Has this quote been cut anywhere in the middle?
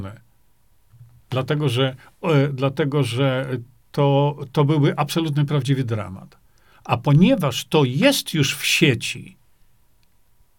no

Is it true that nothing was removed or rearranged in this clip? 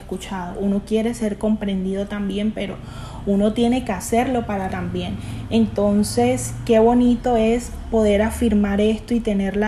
no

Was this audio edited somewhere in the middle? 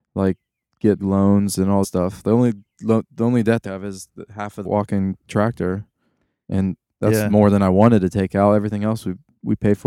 yes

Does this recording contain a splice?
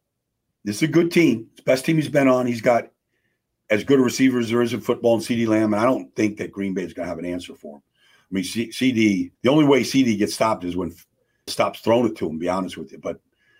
yes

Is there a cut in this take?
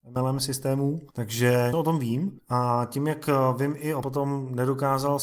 yes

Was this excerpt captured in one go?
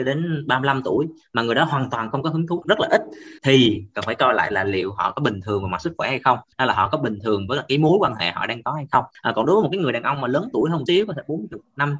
no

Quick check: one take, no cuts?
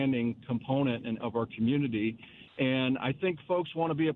no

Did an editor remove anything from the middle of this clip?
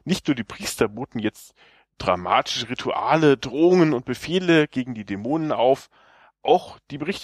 no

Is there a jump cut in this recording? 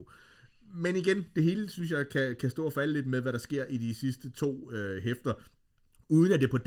no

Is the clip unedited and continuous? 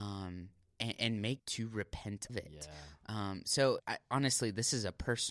no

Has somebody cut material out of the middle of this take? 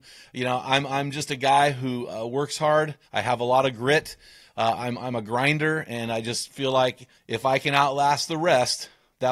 yes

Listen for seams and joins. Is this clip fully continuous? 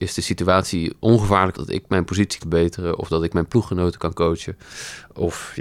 no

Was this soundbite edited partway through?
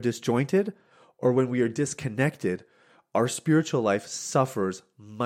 no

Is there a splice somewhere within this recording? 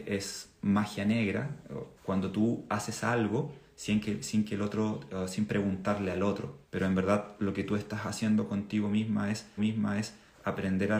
yes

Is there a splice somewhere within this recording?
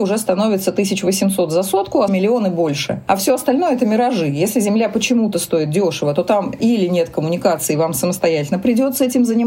yes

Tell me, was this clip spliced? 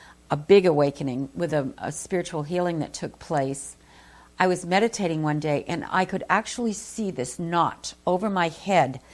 no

